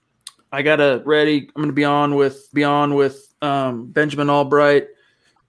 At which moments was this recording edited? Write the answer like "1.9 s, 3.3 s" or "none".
1.0 s, 2.5 s